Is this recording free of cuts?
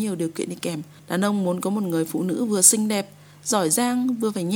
no; 1 cut; at 1.0 s

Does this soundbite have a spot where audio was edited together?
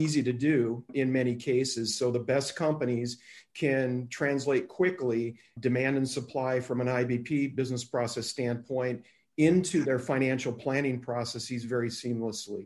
no; 0 cuts

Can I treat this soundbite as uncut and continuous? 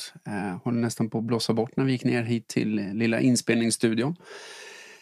yes; 0 cuts

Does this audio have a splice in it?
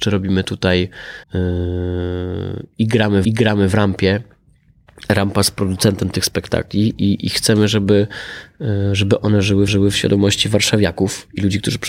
yes; 3 cuts; at 1.2 s, 3.2 s, 9.7 s

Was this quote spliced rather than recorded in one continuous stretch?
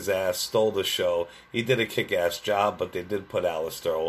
no; 0 cuts

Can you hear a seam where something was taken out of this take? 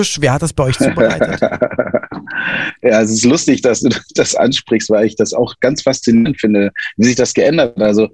no; 0 cuts

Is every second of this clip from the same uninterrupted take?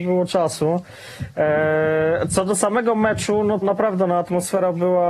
no; 1 cut; at 3.6 s

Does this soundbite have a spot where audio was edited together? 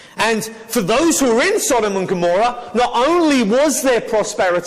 no; 0 cuts

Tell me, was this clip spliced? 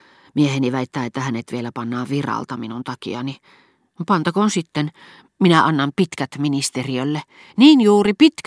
no; 0 cuts

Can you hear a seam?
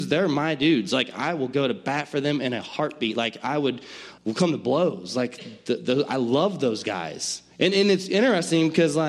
yes; 2 cuts; at 4.2 s, 7.5 s

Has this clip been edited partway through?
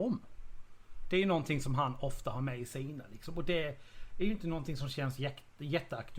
no; 0 cuts

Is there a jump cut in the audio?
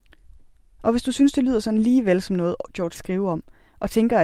yes; 1 cut; at 2.9 s

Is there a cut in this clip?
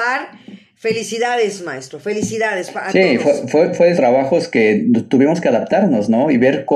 yes; 1 cut; at 4.0 s

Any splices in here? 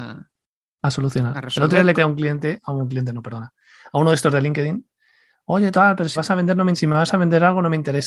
yes; 4 cuts; at 1.9 s, 5.7 s, 6.2 s, 6.7 s

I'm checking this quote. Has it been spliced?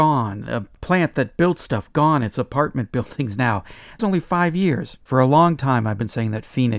yes; 2 cuts; at 4.0 s, 5.0 s

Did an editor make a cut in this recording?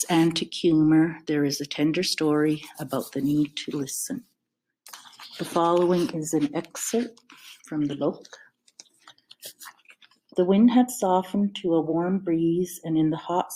no; 0 cuts

